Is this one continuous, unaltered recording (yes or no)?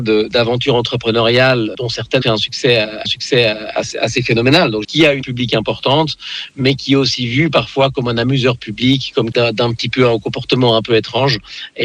no